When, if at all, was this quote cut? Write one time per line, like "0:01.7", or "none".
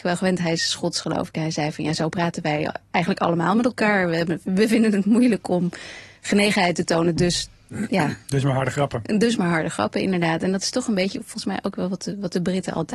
none